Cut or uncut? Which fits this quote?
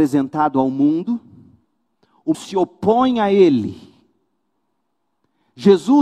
cut